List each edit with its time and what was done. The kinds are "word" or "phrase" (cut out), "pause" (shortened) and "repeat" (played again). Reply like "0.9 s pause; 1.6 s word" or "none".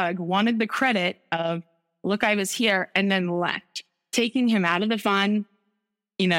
none